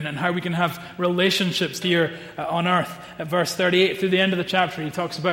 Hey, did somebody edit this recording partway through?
yes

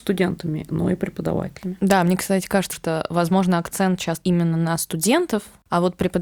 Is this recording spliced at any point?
yes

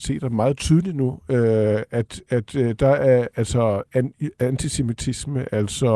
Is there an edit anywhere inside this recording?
no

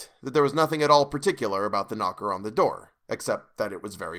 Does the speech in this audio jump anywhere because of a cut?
no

